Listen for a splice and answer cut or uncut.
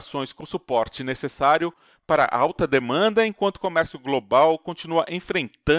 uncut